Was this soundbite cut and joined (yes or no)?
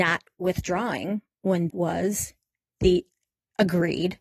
yes